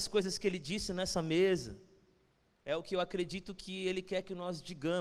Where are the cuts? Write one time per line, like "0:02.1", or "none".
none